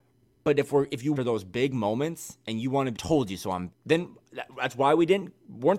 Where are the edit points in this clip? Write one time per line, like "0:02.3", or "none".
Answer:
0:01.2
0:02.9
0:03.7